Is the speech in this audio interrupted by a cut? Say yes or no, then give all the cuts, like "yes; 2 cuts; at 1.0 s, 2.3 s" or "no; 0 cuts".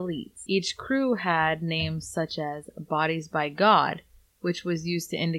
no; 0 cuts